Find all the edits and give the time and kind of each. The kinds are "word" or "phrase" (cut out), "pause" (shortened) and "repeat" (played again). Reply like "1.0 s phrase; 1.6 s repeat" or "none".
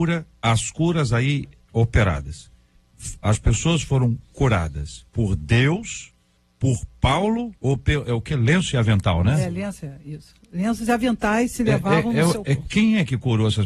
5.1 s pause; 6.4 s pause; 7.6 s pause